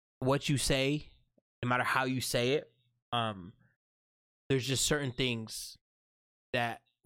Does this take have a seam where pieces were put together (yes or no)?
no